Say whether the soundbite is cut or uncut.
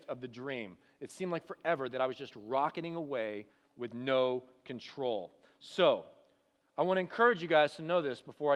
uncut